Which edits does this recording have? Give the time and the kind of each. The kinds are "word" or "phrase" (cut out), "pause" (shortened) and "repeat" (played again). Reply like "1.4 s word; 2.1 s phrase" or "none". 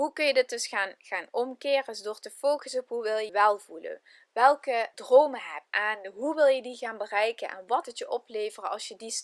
1.0 s word; 3.3 s word; 4.9 s word; 5.7 s word; 7.8 s word